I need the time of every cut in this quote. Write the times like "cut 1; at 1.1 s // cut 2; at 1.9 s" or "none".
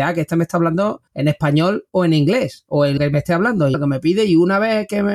cut 1; at 1.1 s // cut 2; at 3.0 s // cut 3; at 3.7 s